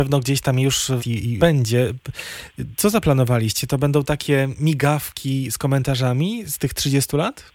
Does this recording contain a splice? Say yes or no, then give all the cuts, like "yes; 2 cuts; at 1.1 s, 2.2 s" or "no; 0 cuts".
yes; 2 cuts; at 1.0 s, 1.4 s